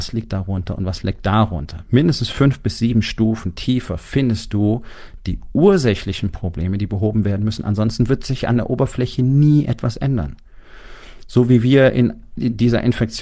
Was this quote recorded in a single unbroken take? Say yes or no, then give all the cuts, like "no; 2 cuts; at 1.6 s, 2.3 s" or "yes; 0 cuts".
yes; 0 cuts